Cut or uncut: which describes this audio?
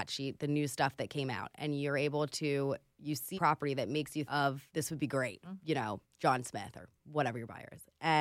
cut